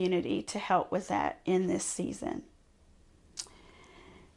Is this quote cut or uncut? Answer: uncut